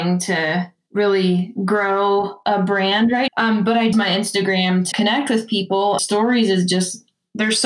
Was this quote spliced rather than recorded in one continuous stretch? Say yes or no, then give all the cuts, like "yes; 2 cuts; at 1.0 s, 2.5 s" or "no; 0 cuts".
yes; 4 cuts; at 3.3 s, 3.9 s, 4.9 s, 6.0 s